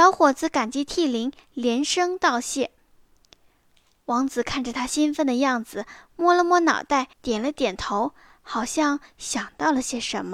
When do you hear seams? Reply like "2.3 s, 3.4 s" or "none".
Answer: 7.1 s